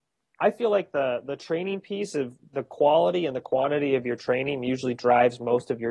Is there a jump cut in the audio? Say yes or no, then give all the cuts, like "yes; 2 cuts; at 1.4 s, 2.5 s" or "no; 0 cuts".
no; 0 cuts